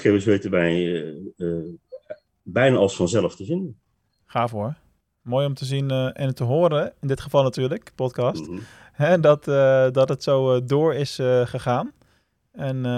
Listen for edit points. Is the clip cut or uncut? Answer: uncut